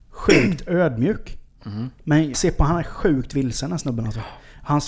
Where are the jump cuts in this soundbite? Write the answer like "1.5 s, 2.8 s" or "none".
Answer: 2.3 s